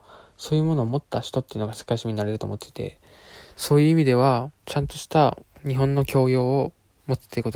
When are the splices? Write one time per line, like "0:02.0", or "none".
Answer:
0:04.6